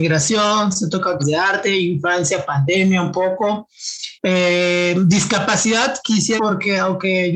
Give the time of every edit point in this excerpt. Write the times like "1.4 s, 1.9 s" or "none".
1.2 s, 4.2 s, 6.4 s